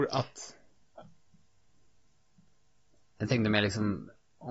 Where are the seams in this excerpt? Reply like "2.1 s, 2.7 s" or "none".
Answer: none